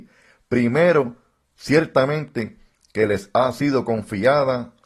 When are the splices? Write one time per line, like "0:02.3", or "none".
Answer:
none